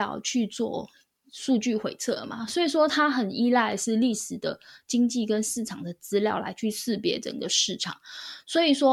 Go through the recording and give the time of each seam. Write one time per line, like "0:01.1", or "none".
none